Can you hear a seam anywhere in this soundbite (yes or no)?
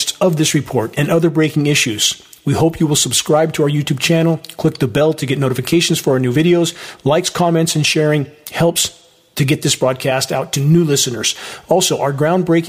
no